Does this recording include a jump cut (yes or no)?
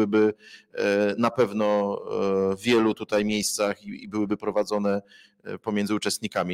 no